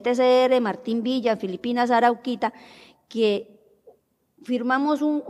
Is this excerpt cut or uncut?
uncut